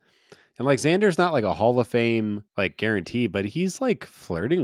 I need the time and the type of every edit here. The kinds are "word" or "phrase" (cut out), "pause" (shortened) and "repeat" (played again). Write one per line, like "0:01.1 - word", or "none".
0:02.5 - pause